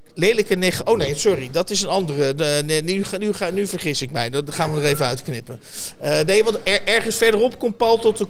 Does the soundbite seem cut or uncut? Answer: uncut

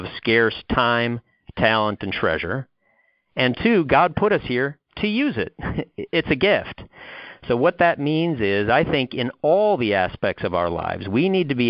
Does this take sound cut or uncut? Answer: uncut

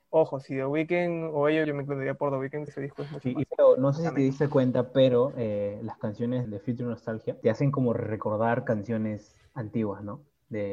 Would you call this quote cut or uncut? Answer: cut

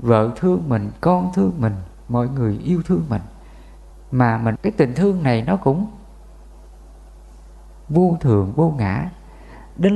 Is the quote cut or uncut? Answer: cut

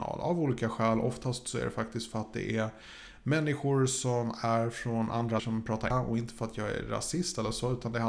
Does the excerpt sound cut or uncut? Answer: cut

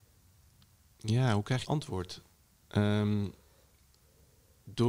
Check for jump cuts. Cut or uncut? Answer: cut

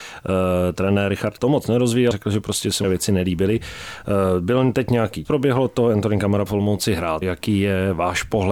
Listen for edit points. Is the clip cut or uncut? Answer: cut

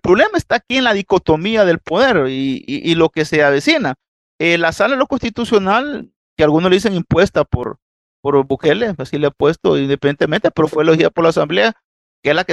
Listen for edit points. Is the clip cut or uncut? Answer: uncut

